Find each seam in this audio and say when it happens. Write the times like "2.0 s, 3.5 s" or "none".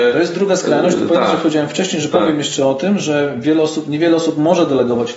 none